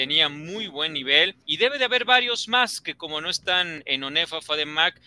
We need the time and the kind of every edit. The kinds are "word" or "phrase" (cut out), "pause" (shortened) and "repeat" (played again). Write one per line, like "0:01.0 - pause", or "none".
0:01.4 - pause